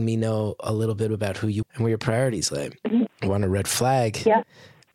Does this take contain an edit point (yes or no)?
yes